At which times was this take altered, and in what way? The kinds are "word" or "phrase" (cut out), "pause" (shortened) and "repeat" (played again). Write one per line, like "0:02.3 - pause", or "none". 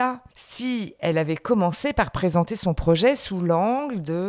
none